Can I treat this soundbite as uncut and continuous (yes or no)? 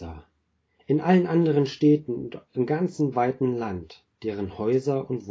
yes